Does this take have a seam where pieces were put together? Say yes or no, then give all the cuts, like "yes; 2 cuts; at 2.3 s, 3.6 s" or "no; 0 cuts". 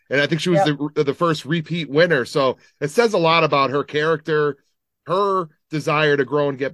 no; 0 cuts